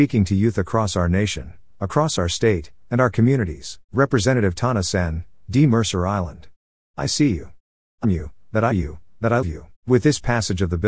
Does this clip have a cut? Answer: yes; 5 cuts; at 3.8 s, 8.0 s, 8.7 s, 9.4 s, 9.7 s

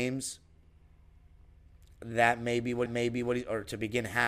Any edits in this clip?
yes; 1 cut; at 2.9 s

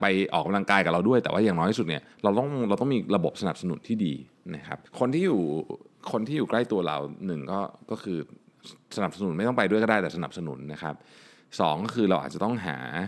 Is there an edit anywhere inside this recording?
yes; 2 cuts; at 2.1 s, 4.9 s

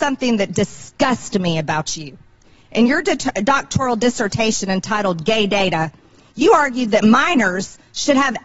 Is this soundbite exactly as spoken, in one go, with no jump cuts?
yes; 0 cuts

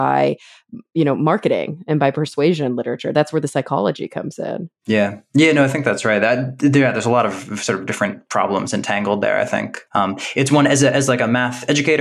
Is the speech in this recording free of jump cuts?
no; 2 cuts; at 4.8 s, 9.9 s

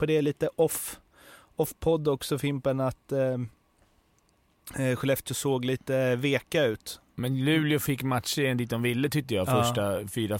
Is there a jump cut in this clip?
no; 0 cuts

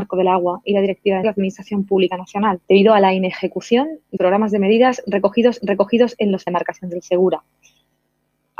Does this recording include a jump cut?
yes; 5 cuts; at 1.2 s, 2.6 s, 4.2 s, 5.6 s, 6.5 s

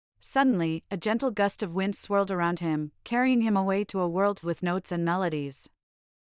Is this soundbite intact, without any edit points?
no; 1 cut; at 4.4 s

